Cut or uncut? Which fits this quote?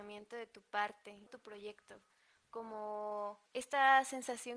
cut